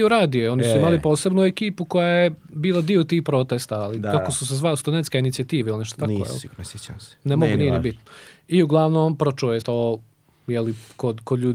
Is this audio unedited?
no; 2 cuts; at 7.6 s, 9.6 s

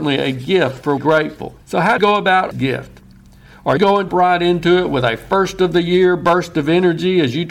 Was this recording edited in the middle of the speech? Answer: yes; 6 cuts; at 1.0 s, 1.6 s, 2.0 s, 2.5 s, 3.8 s, 4.1 s

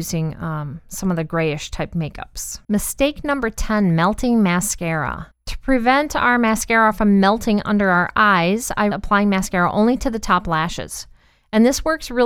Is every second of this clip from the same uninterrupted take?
no; 3 cuts; at 2.6 s, 5.3 s, 8.9 s

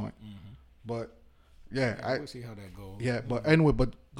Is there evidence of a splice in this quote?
no; 0 cuts

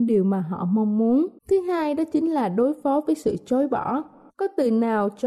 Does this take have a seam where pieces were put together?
yes; 1 cut; at 1.4 s

